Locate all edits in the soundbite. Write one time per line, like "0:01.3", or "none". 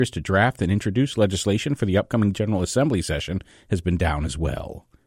none